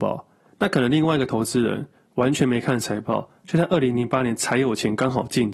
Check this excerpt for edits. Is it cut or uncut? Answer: uncut